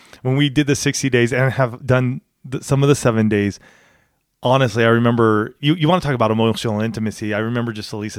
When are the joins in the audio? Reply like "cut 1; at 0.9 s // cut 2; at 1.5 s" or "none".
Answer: none